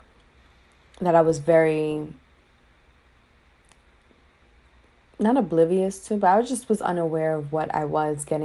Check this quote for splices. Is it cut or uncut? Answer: uncut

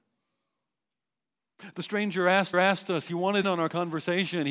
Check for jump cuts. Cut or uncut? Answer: cut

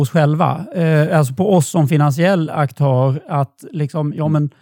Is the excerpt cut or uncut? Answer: uncut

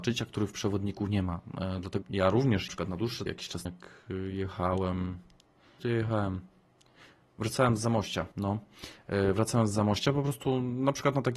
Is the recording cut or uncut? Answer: cut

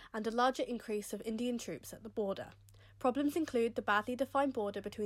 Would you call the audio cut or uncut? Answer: uncut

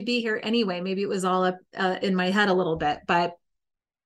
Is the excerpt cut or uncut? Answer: uncut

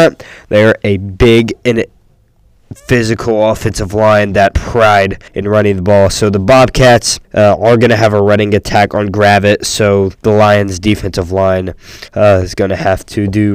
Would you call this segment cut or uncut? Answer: cut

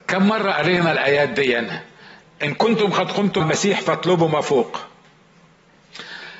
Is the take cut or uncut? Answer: cut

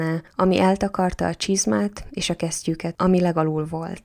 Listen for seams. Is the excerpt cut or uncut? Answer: uncut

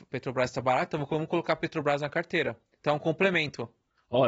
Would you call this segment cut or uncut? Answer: uncut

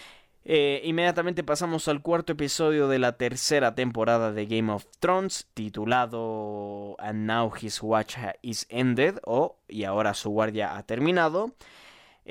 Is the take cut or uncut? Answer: cut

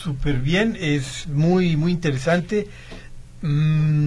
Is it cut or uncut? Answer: uncut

